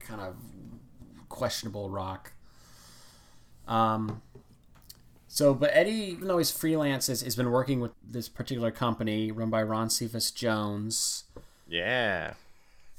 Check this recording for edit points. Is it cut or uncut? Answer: cut